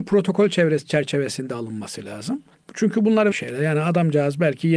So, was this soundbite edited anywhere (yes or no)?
yes